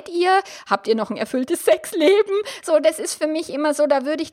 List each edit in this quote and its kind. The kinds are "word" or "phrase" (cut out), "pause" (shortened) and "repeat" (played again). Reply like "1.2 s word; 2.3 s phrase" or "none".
none